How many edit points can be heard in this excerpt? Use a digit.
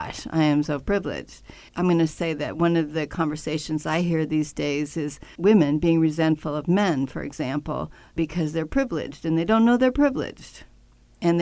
1